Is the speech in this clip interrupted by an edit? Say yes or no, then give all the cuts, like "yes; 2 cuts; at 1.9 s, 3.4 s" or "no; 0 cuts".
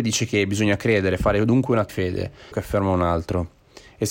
yes; 2 cuts; at 1.9 s, 2.5 s